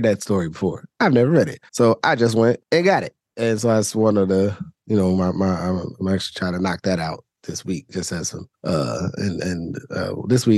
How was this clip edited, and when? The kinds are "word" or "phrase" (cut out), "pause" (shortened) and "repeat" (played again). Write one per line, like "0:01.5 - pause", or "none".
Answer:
0:01.7 - pause
0:02.6 - pause
0:03.2 - pause
0:08.5 - pause